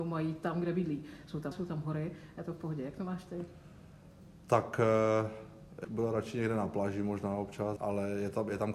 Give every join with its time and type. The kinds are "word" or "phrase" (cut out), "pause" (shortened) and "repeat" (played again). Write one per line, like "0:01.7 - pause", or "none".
0:01.5 - word
0:05.8 - word
0:07.8 - word

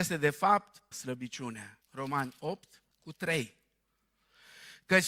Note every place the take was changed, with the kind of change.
0:00.9 - phrase
0:01.8 - pause
0:02.9 - pause

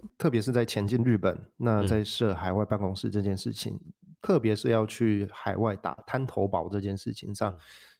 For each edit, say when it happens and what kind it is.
none

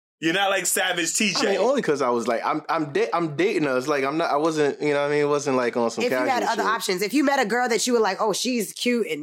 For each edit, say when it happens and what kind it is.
none

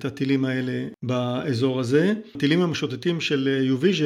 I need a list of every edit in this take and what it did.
none

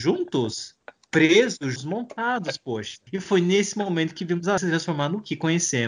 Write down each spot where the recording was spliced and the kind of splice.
0:01.8 - word
0:03.1 - pause
0:04.6 - word

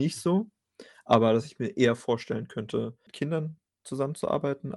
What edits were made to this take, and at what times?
none

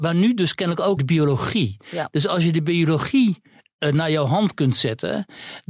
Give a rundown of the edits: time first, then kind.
0:01.0 - word

